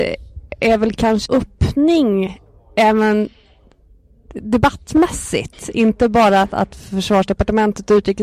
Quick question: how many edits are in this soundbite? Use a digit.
1